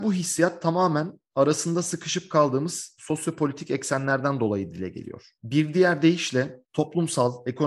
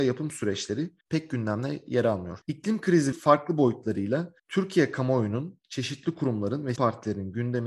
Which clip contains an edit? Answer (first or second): second